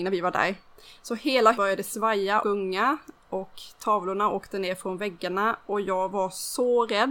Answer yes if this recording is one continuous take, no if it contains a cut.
no